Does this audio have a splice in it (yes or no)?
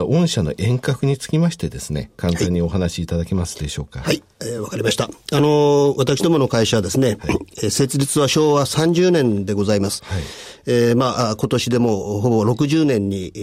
no